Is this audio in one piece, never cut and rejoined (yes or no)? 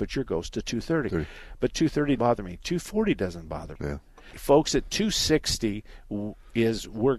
no